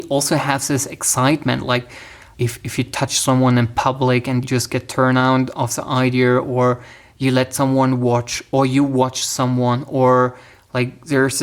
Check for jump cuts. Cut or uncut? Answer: cut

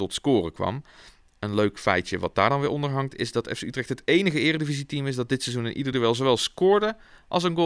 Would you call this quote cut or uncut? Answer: uncut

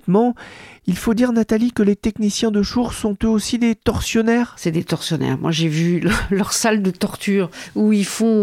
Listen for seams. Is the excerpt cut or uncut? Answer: uncut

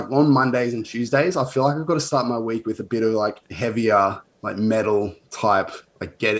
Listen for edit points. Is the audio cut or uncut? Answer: uncut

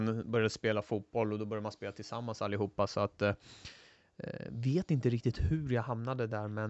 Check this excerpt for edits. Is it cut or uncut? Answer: uncut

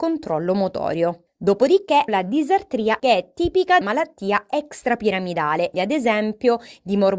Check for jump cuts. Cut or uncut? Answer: cut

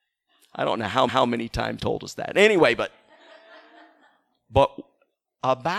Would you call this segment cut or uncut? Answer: cut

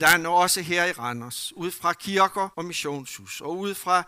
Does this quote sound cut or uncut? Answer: cut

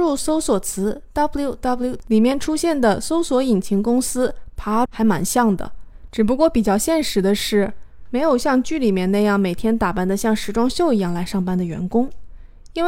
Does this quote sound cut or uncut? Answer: cut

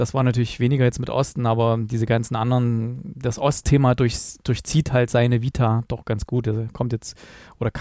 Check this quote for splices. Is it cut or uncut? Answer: uncut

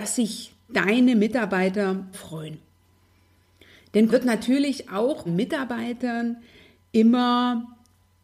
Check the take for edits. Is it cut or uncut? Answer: cut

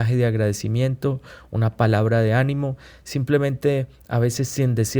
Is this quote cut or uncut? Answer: uncut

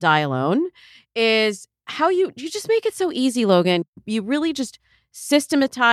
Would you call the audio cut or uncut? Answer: uncut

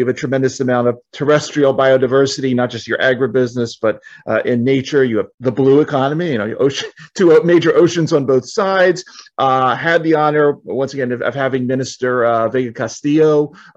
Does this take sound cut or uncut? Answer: cut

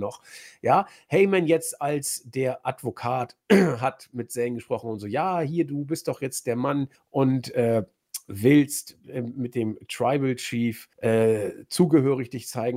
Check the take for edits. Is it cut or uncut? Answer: cut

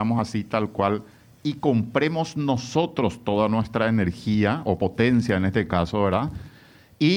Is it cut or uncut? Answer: uncut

